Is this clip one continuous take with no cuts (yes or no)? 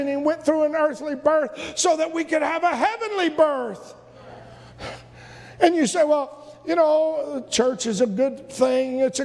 yes